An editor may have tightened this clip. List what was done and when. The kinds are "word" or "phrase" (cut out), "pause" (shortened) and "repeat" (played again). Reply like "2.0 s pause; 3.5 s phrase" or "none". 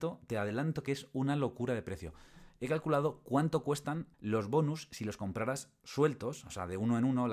4.1 s pause